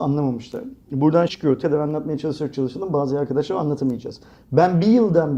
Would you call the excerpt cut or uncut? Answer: cut